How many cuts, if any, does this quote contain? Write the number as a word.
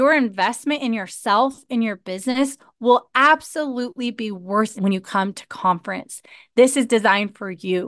one